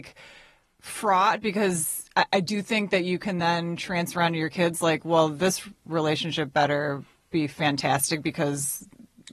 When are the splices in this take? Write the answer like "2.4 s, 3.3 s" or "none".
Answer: none